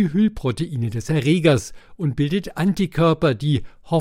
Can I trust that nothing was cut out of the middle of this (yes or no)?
yes